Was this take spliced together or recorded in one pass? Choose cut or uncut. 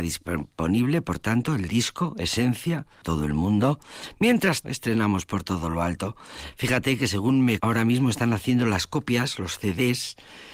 cut